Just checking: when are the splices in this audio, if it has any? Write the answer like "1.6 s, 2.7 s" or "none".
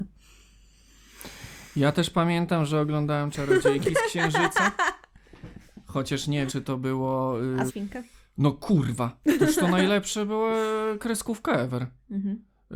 6.5 s, 7.7 s